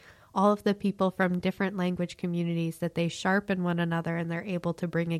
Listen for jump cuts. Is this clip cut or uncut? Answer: uncut